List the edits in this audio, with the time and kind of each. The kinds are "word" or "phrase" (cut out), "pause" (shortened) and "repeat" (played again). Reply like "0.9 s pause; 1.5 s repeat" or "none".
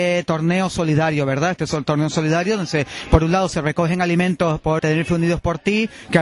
4.8 s word